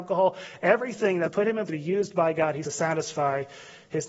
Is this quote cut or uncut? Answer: cut